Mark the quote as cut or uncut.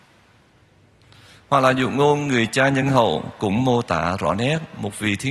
uncut